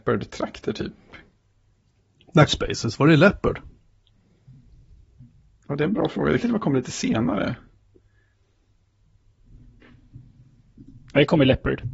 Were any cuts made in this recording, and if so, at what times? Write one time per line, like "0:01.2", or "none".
0:02.5
0:06.4